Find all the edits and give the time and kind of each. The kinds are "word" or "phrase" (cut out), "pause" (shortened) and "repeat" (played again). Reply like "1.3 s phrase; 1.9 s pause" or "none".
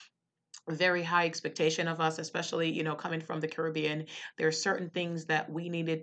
none